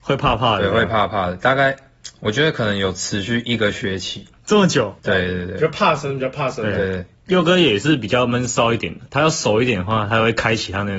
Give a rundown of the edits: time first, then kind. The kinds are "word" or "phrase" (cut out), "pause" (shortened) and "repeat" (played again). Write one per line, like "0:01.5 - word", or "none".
0:02.2 - pause
0:05.0 - pause
0:09.1 - pause